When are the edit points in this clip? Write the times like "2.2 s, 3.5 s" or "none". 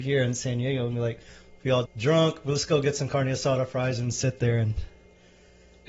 1.9 s